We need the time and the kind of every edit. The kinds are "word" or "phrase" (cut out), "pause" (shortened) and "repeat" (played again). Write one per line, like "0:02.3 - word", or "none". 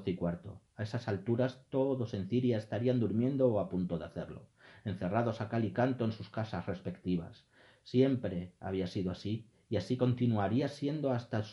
none